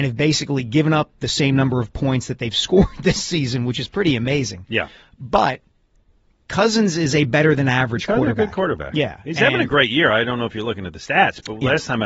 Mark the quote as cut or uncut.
uncut